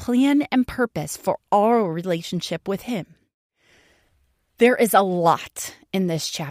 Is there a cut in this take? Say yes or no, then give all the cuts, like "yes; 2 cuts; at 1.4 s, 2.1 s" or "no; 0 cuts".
no; 0 cuts